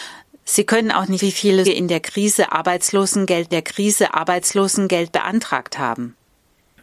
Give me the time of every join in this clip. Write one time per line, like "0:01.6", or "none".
0:01.2
0:01.6
0:03.5